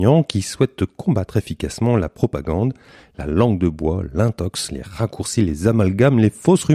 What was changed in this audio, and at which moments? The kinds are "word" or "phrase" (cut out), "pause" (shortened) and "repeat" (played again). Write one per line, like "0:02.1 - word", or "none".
none